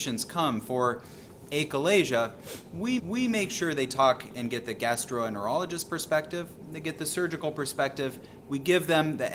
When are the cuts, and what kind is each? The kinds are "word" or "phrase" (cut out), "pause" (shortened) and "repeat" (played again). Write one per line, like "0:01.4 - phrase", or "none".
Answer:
0:03.0 - repeat